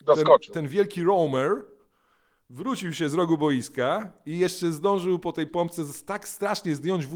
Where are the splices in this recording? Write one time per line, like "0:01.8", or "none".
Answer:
0:05.5

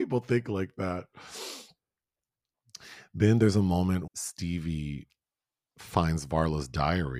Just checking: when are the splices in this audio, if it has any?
0:04.1

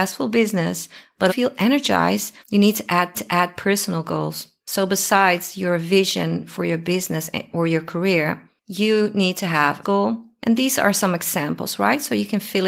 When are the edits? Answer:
0:01.3
0:02.4
0:03.1
0:09.8

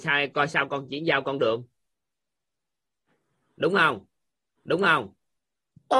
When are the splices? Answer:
0:04.6

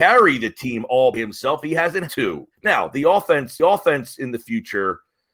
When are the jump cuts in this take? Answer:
0:01.1
0:02.1
0:02.5
0:03.6

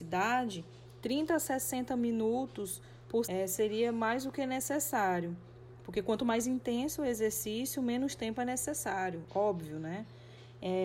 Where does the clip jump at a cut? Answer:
0:03.2

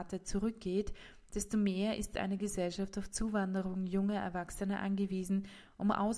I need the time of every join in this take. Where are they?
none

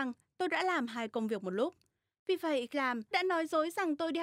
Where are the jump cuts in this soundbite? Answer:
0:02.7
0:03.1

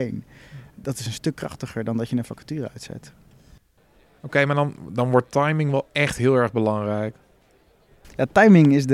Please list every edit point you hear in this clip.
none

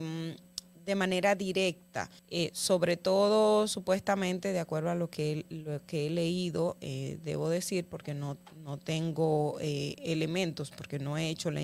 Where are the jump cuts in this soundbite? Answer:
0:02.2

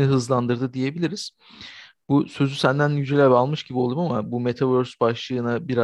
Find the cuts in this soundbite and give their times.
none

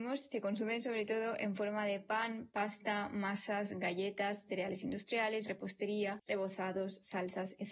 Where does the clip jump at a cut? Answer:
0:05.5

